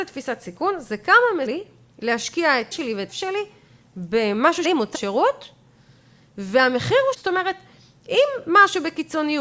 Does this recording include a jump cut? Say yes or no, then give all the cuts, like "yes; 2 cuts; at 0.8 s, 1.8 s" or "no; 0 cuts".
yes; 6 cuts; at 1.5 s, 2.7 s, 3.1 s, 4.6 s, 4.9 s, 7.1 s